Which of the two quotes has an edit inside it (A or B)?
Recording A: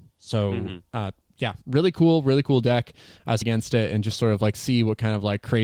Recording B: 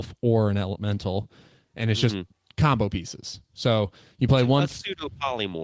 A